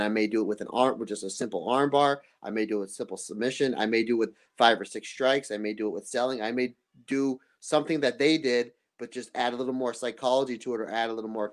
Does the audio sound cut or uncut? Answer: uncut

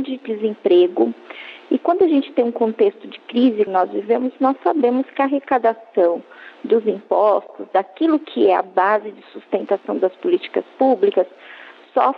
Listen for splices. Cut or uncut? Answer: cut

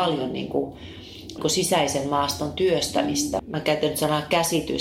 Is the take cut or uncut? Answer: cut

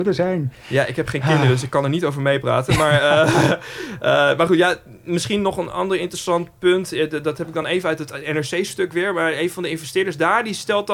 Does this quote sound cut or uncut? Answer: uncut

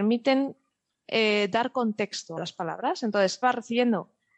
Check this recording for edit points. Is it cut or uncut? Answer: cut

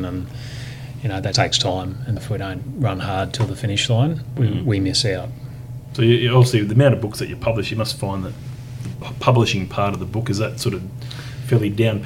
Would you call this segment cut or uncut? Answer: cut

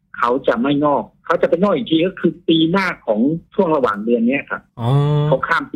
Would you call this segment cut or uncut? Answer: cut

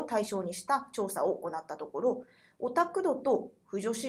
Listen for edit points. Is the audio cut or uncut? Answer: uncut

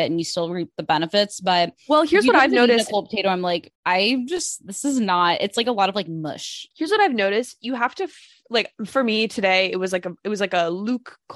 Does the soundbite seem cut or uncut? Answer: cut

